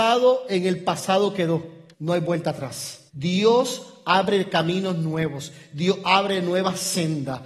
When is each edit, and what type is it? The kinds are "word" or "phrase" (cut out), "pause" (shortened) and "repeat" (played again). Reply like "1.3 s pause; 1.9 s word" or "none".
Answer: 1.9 s pause; 3.1 s pause